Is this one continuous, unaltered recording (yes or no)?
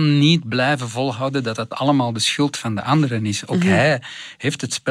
yes